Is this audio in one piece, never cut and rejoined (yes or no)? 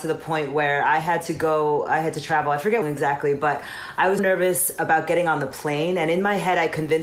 no